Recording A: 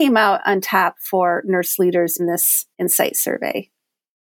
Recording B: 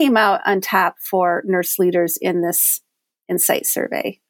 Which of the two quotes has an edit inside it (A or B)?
A